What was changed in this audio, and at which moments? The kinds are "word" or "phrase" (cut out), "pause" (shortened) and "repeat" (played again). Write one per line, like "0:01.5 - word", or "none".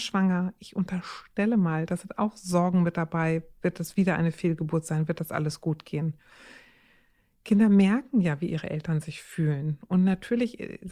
none